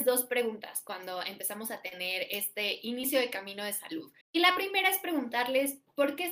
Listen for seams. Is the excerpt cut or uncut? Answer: cut